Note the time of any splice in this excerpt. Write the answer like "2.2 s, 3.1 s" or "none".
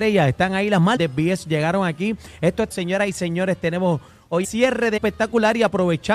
1.0 s, 2.7 s, 4.4 s, 5.0 s